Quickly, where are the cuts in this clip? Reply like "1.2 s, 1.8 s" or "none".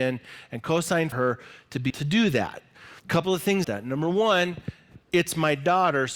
1.1 s, 1.9 s, 3.0 s, 3.6 s, 5.0 s